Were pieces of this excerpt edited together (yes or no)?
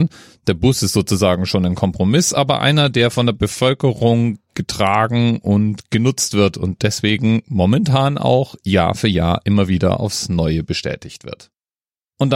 no